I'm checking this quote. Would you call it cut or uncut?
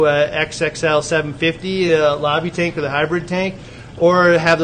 uncut